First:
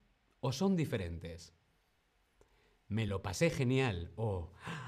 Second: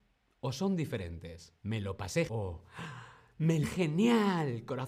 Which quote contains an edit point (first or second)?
second